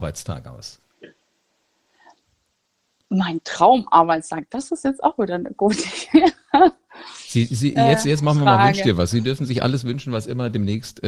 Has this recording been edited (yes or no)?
no